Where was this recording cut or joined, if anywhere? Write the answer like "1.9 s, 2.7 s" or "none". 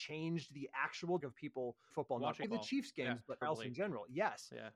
1.2 s, 1.9 s, 2.4 s, 3.4 s